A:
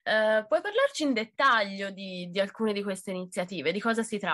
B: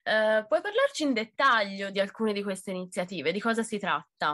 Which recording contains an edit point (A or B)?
B